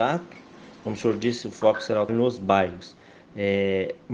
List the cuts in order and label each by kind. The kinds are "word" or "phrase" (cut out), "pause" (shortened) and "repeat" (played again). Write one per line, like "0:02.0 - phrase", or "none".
0:02.1 - word